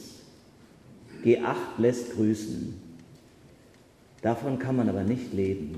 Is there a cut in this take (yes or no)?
no